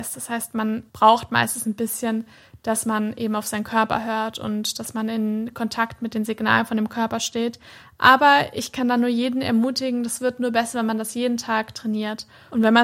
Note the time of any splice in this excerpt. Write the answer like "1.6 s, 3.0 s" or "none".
none